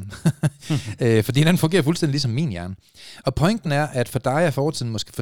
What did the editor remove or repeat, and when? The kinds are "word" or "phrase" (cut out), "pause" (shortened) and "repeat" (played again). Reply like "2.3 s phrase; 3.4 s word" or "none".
none